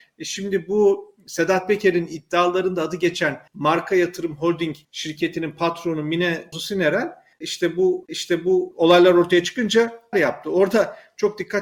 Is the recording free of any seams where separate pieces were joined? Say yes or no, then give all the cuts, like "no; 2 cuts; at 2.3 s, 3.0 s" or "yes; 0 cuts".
no; 5 cuts; at 3.5 s, 4.8 s, 6.5 s, 8.1 s, 10.1 s